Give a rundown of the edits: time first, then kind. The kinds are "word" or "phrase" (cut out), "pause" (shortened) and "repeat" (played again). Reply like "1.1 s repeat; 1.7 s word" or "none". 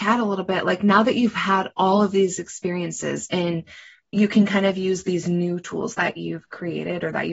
none